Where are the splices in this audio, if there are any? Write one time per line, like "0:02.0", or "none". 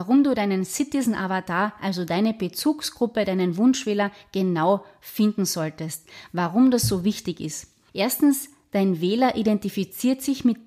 none

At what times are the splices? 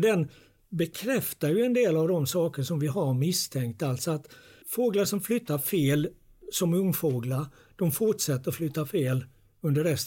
none

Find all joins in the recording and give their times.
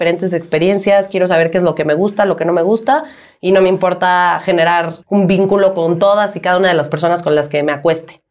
0:05.0

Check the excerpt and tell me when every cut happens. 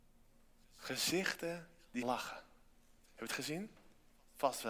0:02.0

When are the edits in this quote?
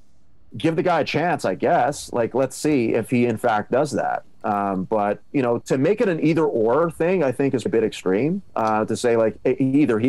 0:05.6
0:07.7

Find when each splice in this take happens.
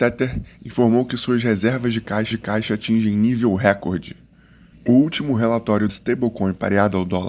0:02.3
0:05.9

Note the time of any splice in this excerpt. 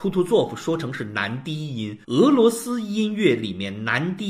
0:02.0

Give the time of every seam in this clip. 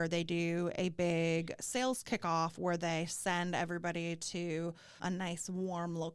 0:05.0

